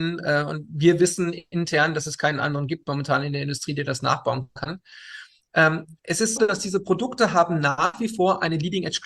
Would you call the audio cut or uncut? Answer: cut